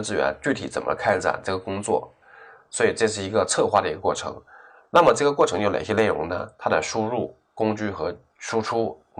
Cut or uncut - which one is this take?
uncut